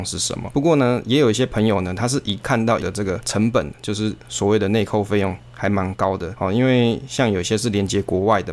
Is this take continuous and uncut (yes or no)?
no